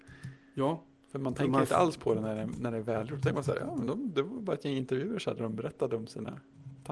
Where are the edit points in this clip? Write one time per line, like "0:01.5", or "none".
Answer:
none